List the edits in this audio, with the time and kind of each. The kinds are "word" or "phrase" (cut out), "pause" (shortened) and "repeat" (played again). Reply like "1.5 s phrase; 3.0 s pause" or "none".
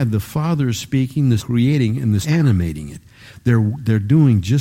1.4 s word; 2.2 s word

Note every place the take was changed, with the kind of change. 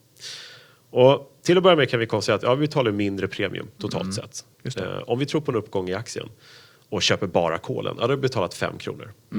none

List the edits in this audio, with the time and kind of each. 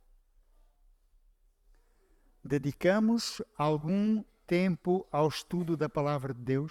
none

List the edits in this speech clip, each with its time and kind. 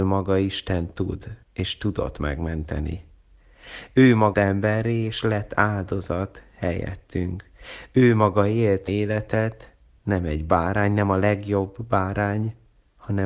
1.4 s pause; 4.3 s word; 8.9 s word

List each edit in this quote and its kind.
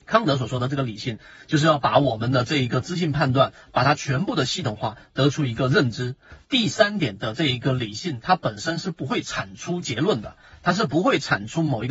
6.4 s pause

